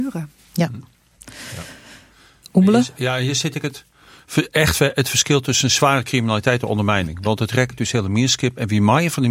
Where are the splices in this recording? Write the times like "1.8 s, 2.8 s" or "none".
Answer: none